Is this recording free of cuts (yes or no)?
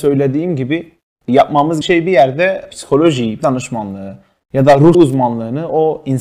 no